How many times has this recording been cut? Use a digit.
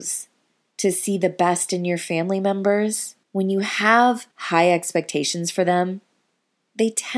2